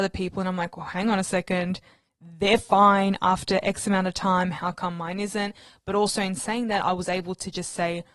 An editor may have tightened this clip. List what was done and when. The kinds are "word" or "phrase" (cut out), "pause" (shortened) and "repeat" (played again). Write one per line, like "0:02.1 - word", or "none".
none